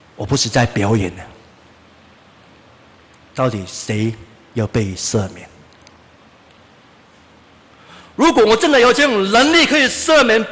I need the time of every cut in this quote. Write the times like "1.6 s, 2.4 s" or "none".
none